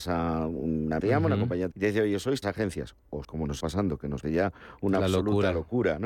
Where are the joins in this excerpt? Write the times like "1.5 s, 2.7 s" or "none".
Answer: 1.0 s, 1.7 s, 2.4 s, 3.2 s, 3.6 s, 4.2 s

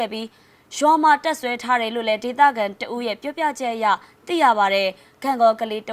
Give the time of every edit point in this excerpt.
none

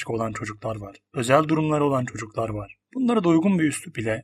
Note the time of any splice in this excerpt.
2.8 s

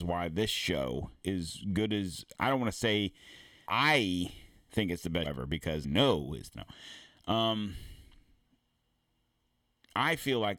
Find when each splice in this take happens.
1.2 s, 2.3 s, 3.7 s, 5.2 s, 5.8 s, 6.5 s

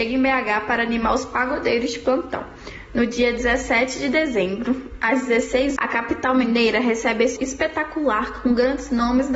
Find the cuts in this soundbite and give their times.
5.8 s, 7.4 s

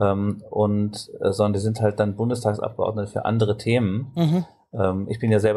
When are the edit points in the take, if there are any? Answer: none

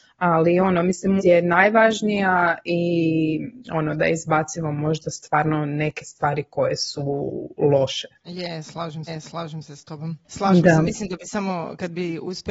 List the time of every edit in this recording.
1.2 s, 3.6 s, 8.2 s, 9.1 s, 10.2 s

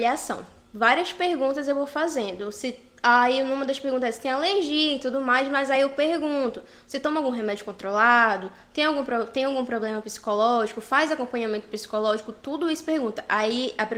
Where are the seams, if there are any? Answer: none

